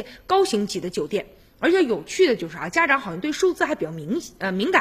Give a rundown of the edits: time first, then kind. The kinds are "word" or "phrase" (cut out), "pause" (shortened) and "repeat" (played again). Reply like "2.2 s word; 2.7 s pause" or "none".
none